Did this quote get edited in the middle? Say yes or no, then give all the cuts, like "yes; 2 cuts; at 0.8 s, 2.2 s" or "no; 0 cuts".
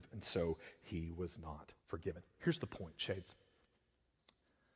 yes; 1 cut; at 1.8 s